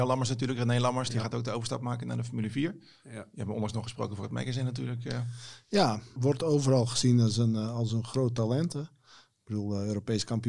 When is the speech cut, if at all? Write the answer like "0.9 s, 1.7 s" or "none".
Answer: 6.2 s